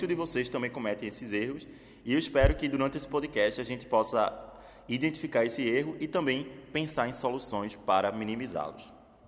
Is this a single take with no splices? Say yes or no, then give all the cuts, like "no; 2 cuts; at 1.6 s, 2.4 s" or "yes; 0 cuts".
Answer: yes; 0 cuts